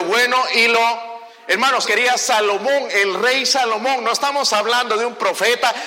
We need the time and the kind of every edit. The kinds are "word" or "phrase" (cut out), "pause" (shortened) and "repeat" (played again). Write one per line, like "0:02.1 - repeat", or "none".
0:01.8 - word